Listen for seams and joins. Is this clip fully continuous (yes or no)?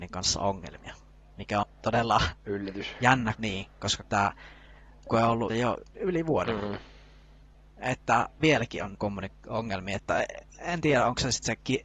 no